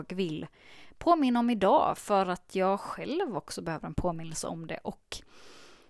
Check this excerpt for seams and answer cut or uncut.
uncut